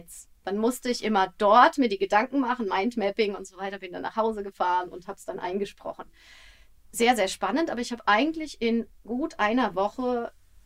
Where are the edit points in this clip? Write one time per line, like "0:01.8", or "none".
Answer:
none